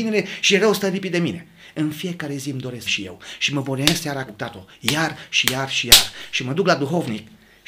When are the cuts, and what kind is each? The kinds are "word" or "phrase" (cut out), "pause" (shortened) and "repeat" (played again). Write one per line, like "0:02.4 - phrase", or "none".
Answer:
0:02.9 - phrase
0:04.3 - word